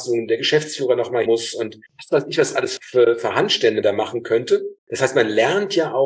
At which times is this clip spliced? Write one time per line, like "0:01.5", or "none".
0:01.3
0:01.9
0:02.8
0:03.8
0:04.8